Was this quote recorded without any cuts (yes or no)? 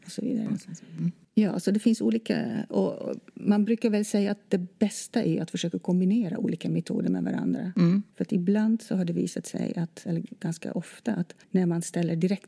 no